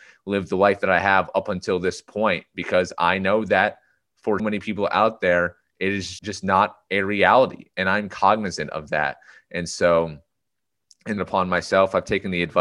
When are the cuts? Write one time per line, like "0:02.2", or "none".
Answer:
0:04.4
0:06.2
0:11.2